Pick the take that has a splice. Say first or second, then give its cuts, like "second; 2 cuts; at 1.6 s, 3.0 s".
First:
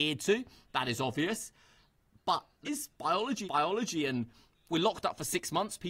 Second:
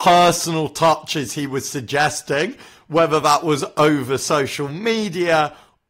first; 3 cuts; at 2.6 s, 3.4 s, 4.7 s